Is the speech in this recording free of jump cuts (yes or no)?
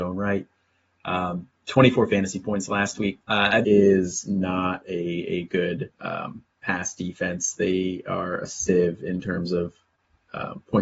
no